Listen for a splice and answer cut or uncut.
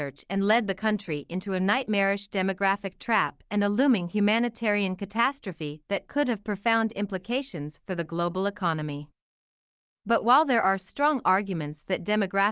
uncut